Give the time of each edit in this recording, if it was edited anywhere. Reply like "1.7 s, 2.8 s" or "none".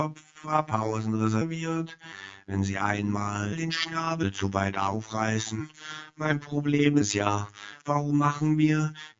none